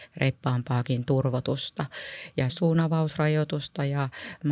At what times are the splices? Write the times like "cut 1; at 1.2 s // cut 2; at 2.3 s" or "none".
cut 1; at 2.5 s